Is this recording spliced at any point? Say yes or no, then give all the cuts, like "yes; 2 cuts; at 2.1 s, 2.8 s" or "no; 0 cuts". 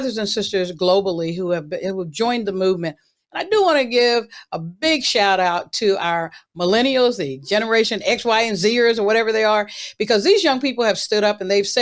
no; 0 cuts